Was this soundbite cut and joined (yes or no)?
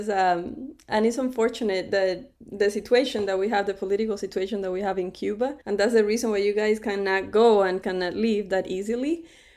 yes